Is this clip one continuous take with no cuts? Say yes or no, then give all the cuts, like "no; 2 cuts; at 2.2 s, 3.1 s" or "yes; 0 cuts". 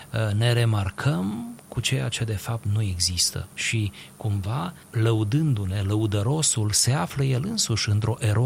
no; 2 cuts; at 3.5 s, 4.8 s